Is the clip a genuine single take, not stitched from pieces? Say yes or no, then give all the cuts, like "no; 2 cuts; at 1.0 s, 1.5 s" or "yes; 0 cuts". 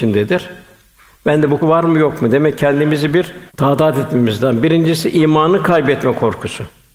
no; 2 cuts; at 1.6 s, 3.5 s